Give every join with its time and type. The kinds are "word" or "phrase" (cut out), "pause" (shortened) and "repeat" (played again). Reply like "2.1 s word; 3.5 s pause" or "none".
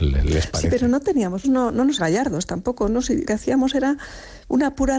1.4 s word; 2.0 s word; 3.2 s word

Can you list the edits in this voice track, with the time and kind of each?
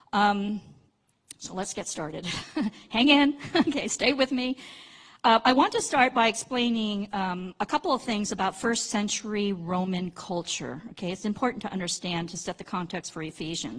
none

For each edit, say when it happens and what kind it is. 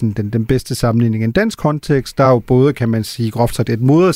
none

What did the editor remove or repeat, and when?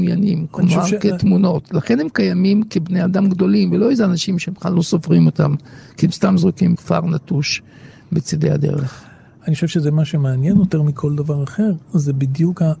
6.7 s word; 10.7 s word

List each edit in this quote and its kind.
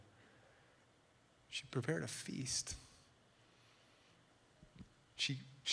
1.7 s word

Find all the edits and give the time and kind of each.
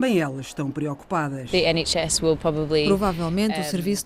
none

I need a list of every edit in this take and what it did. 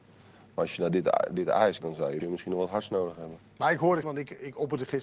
1.8 s word; 2.2 s word; 4.0 s word

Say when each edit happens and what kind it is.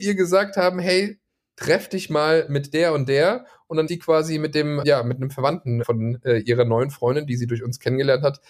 3.9 s word; 4.8 s word; 5.8 s word

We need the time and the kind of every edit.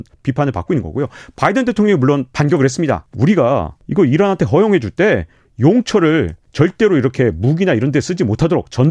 none

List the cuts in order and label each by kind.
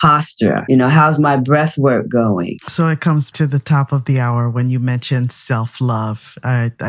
3.3 s word

